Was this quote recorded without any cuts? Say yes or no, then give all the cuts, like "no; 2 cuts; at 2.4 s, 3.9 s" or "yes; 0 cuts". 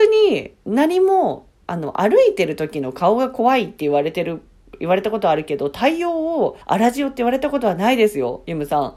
no; 1 cut; at 6.6 s